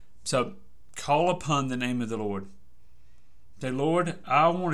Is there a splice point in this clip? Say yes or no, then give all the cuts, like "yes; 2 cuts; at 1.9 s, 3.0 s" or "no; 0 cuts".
no; 0 cuts